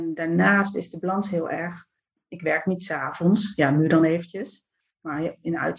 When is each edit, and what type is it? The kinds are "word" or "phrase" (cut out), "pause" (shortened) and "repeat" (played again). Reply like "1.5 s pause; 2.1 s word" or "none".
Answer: none